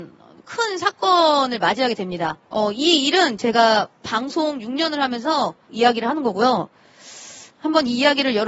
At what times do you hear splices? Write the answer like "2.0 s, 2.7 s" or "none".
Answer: 2.4 s, 5.7 s